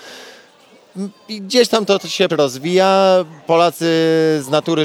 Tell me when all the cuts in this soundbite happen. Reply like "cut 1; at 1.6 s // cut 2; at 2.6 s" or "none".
cut 1; at 2.3 s

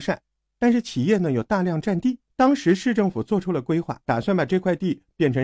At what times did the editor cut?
cut 1; at 2.3 s // cut 2; at 4.0 s

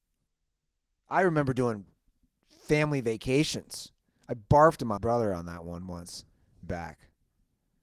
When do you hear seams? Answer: cut 1; at 5.0 s // cut 2; at 6.6 s

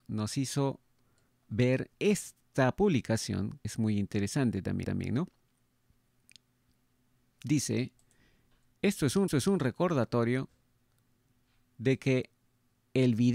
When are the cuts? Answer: cut 1; at 1.3 s // cut 2; at 1.9 s // cut 3; at 3.6 s // cut 4; at 4.8 s // cut 5; at 9.3 s

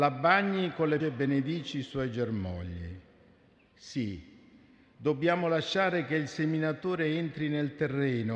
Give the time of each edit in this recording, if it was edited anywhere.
cut 1; at 1.0 s

